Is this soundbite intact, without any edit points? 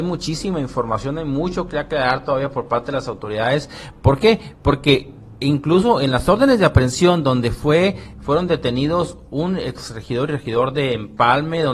yes; 0 cuts

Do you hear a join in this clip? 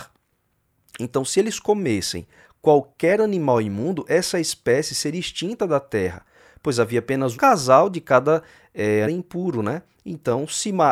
yes; 2 cuts; at 7.3 s, 9.0 s

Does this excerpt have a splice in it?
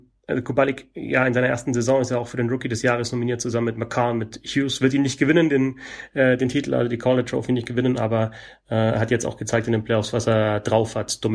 no; 0 cuts

